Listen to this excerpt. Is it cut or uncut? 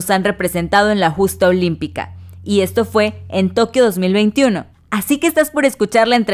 cut